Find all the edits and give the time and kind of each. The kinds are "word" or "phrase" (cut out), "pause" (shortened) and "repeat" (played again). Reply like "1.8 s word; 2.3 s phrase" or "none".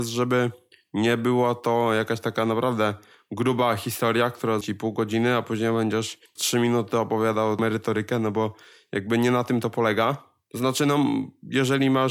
4.6 s word; 6.4 s word